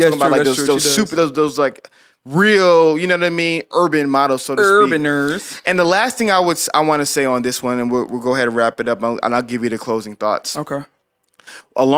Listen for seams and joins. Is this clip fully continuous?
yes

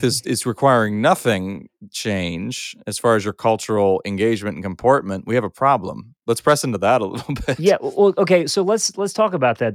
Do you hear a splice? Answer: no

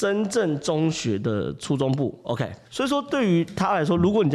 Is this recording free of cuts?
no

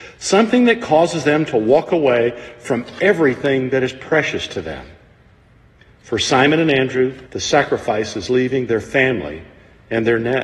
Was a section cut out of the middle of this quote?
yes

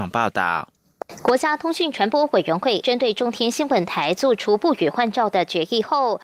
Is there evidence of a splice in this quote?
yes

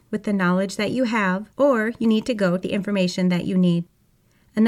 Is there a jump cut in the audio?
yes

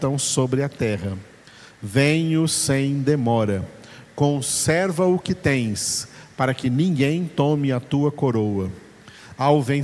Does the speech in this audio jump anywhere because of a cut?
no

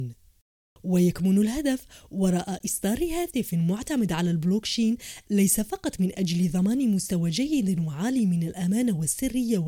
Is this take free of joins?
yes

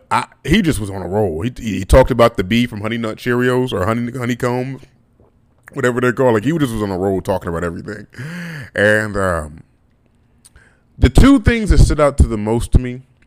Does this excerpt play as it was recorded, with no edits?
yes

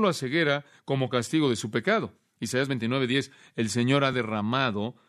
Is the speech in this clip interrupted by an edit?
no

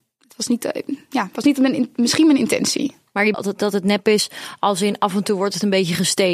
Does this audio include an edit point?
yes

